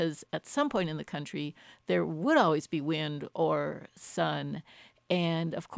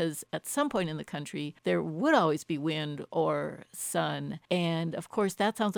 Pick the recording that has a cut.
second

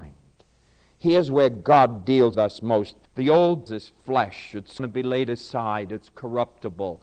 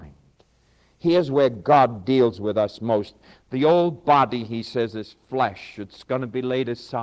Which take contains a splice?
first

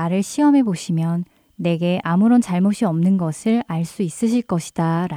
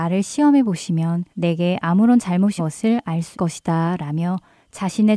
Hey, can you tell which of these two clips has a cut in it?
second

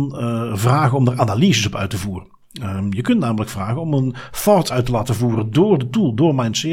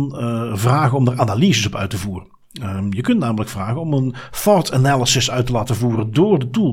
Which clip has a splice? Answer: first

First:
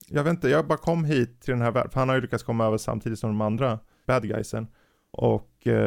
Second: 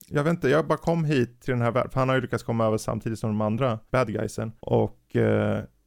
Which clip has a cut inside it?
second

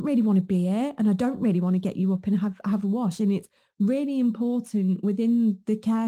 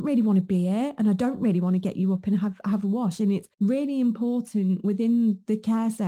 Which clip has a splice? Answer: second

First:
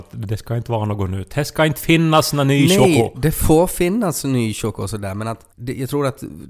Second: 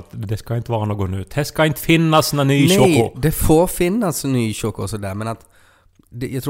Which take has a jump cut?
first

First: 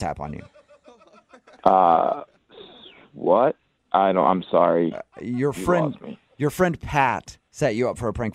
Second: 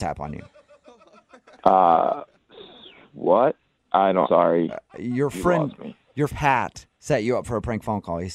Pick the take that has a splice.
second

